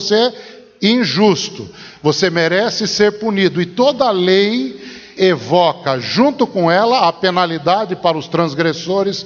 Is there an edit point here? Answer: yes; 1 cut; at 5.2 s

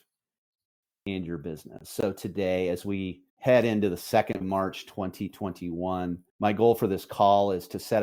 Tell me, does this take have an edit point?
yes; 3 cuts; at 3.3 s, 4.4 s, 6.3 s

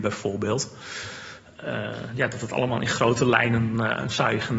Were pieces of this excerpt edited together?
no; 0 cuts

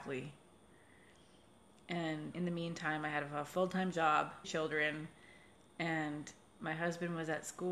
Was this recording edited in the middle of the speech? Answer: yes; 2 cuts; at 2.3 s, 4.4 s

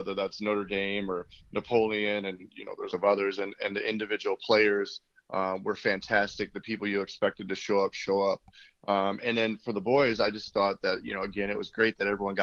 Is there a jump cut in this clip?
yes; 1 cut; at 2.9 s

